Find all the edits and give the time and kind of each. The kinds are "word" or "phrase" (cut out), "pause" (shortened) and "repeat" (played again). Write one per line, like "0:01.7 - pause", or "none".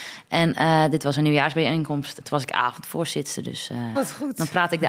0:02.2 - word
0:03.9 - word